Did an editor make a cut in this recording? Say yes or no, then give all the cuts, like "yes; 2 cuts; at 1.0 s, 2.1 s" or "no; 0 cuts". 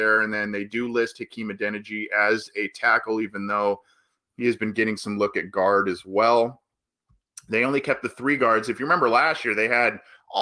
no; 0 cuts